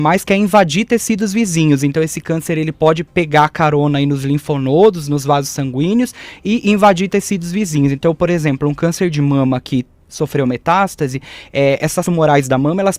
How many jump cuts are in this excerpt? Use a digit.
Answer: 1